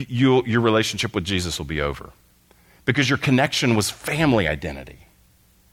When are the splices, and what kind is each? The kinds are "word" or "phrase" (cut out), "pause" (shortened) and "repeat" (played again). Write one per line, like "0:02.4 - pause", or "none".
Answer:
none